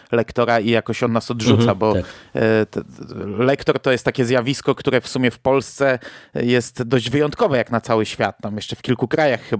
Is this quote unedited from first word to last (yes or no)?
yes